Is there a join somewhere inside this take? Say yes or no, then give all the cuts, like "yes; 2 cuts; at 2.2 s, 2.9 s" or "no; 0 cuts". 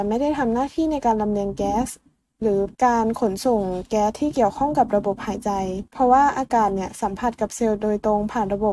yes; 2 cuts; at 2.7 s, 5.9 s